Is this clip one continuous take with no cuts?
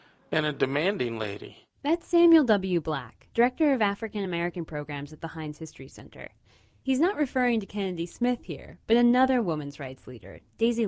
yes; 0 cuts

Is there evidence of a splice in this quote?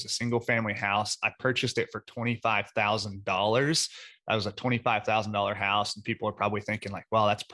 no; 0 cuts

